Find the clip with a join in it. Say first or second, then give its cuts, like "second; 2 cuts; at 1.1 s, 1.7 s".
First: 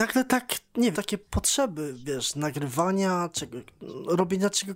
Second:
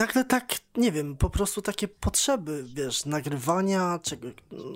first; 1 cut; at 0.9 s